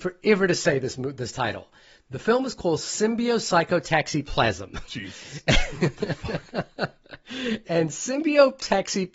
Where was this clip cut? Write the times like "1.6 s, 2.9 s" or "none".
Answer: 7.6 s